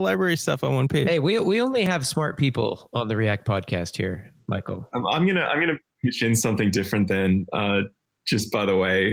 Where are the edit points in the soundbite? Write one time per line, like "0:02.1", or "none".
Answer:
none